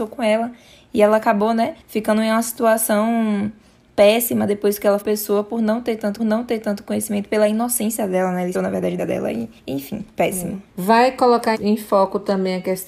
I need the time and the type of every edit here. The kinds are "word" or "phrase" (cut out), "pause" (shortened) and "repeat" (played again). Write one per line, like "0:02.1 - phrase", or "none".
0:01.8 - pause
0:05.0 - phrase
0:06.2 - repeat
0:08.5 - phrase
0:09.0 - word
0:09.6 - pause
0:10.7 - pause
0:11.5 - word

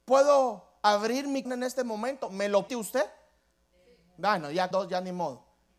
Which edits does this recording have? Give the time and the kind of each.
0:01.4 - word
0:02.7 - word
0:04.7 - word

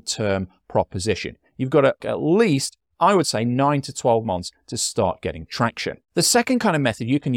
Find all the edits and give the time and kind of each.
0:02.0 - word
0:06.0 - pause

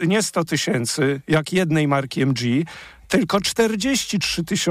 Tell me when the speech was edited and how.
none

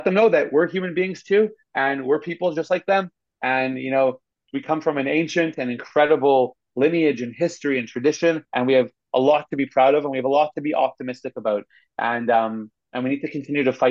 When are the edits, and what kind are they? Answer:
0:08.5 - pause

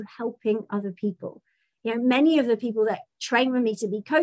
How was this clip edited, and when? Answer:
none

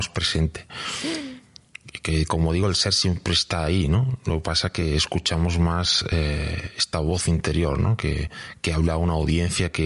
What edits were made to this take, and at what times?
none

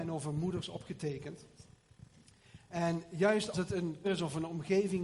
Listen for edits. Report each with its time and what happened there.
0:03.5 - word
0:04.0 - word

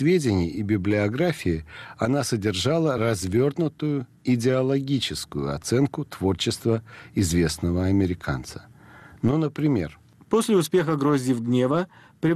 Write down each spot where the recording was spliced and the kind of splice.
none

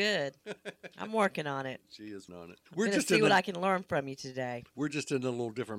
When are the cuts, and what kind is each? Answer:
0:02.3 - word
0:02.7 - pause

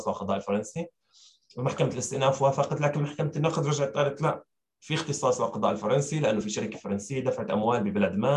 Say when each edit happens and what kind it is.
none

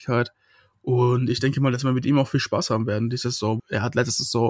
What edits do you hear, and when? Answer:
0:03.6 - word

